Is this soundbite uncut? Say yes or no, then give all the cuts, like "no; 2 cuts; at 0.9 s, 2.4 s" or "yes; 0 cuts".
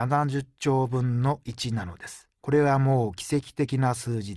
no; 1 cut; at 2.3 s